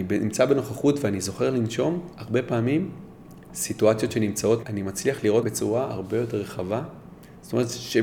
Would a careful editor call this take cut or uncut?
cut